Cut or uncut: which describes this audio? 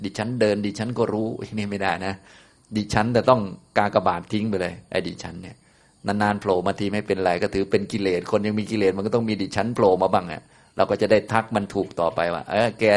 uncut